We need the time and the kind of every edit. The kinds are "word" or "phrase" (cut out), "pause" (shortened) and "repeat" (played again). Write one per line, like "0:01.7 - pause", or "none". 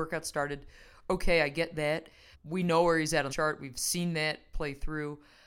0:02.3 - word
0:03.3 - phrase